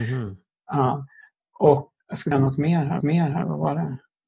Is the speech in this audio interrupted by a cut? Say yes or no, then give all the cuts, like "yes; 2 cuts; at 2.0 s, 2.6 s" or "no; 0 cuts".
yes; 3 cuts; at 2.0 s, 2.3 s, 3.0 s